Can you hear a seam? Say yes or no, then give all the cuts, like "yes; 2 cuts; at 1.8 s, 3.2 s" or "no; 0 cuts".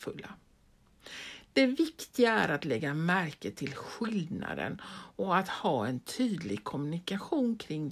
no; 0 cuts